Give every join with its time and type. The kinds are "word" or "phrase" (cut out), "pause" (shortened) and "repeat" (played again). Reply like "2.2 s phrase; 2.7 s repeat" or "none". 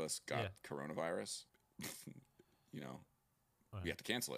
1.5 s pause